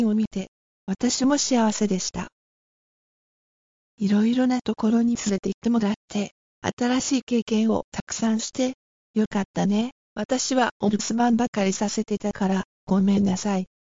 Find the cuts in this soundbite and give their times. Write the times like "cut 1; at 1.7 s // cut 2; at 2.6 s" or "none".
cut 1; at 10.0 s